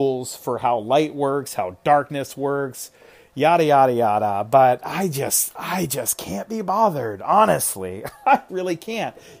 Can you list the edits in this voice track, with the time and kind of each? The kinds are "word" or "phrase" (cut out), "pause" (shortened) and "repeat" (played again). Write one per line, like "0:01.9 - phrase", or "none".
0:08.5 - word